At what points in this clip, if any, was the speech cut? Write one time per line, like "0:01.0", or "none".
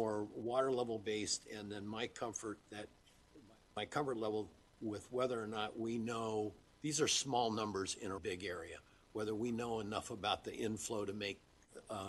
0:08.2